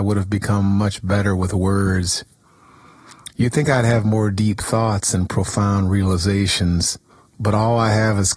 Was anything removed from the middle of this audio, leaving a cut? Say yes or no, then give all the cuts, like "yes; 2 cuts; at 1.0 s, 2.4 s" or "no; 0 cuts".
yes; 1 cut; at 7.1 s